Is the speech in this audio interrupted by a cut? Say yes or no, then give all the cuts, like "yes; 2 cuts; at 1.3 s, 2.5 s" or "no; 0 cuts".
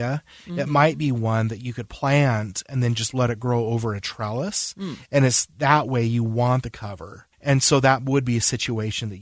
yes; 1 cut; at 7.3 s